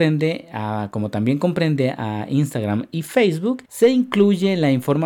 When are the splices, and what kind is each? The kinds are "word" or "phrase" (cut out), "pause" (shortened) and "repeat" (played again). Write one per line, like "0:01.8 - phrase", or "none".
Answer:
0:03.6 - pause